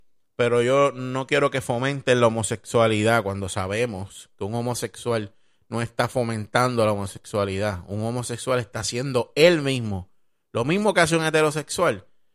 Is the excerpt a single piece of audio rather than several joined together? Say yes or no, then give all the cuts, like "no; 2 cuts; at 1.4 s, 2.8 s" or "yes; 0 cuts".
yes; 0 cuts